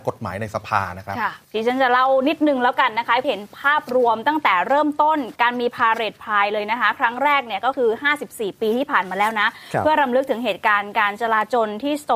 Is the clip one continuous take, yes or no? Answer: no